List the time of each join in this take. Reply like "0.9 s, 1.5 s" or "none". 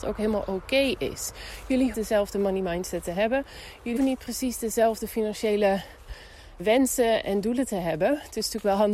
1.9 s, 4.0 s, 6.6 s, 7.2 s